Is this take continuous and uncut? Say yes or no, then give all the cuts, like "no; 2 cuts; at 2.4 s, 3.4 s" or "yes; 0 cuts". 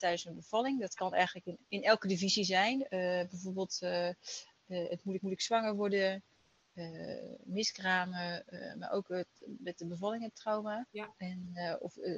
no; 3 cuts; at 1.6 s, 5.2 s, 10.9 s